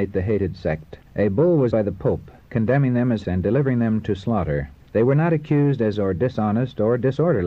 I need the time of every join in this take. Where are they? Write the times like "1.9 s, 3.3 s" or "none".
1.1 s, 1.7 s, 3.2 s, 4.8 s, 5.9 s